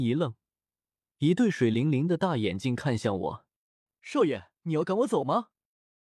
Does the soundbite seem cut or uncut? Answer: cut